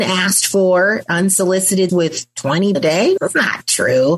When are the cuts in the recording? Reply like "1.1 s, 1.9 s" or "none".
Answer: 1.9 s, 2.7 s, 3.2 s